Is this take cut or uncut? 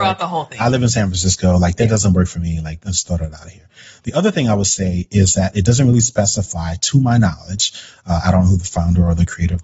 uncut